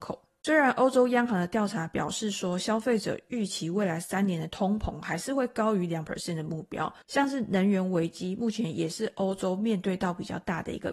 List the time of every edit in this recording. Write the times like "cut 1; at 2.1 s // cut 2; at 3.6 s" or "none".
none